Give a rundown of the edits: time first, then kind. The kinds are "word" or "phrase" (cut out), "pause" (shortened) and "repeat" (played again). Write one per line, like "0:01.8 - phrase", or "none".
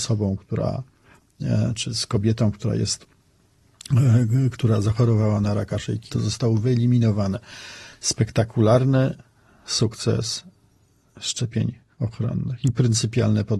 0:06.1 - word

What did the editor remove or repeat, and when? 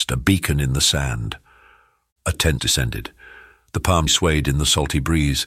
0:02.6 - word
0:04.1 - word

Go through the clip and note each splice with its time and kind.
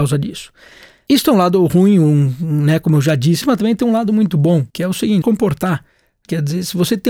0:03.4 - word
0:04.7 - pause
0:05.2 - phrase

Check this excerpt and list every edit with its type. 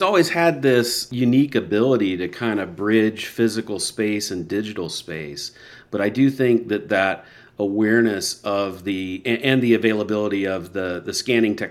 none

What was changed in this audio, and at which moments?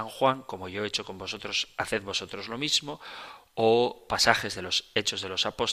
none

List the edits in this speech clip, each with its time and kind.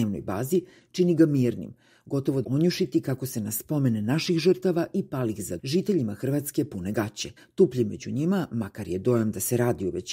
0:02.4 - phrase
0:05.6 - word
0:07.4 - pause

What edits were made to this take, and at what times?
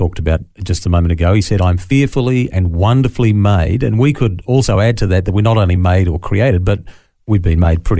none

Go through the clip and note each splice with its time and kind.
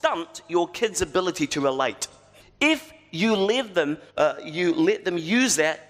0:02.4 - pause
0:04.1 - pause

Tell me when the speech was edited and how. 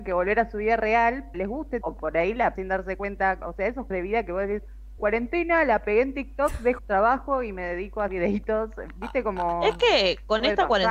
0:01.3 - word
0:01.8 - word
0:02.6 - word
0:03.9 - word
0:05.0 - word
0:06.8 - word
0:08.1 - word

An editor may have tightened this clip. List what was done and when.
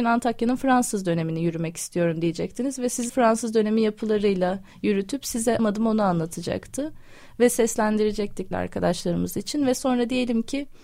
0:03.1 - word
0:05.6 - word
0:08.5 - phrase

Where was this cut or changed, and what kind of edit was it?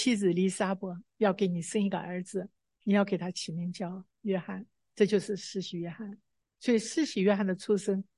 none

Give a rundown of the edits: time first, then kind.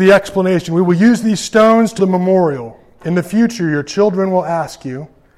0:02.0 - word

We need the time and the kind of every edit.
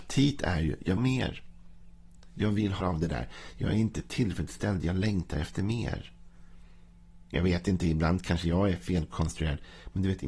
0:01.0 - phrase
0:02.8 - word
0:07.3 - pause

